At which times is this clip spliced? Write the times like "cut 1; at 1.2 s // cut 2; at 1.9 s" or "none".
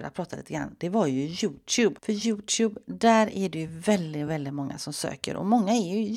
none